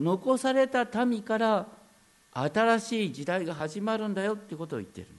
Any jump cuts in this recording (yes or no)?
no